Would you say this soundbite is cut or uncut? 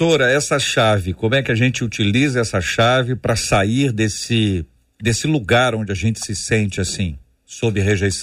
uncut